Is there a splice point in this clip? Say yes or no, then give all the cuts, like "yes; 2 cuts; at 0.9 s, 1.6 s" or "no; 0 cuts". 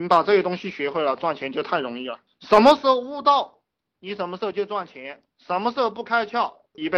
no; 0 cuts